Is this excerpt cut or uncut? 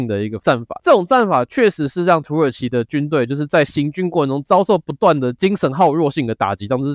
uncut